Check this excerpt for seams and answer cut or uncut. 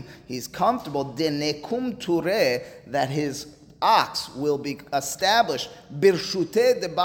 uncut